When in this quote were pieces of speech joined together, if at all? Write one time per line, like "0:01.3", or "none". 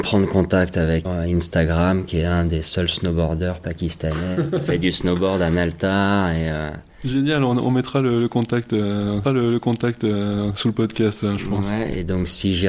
0:01.0
0:09.2